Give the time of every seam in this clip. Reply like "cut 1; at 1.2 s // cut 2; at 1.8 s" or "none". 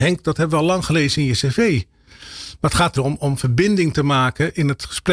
cut 1; at 3.0 s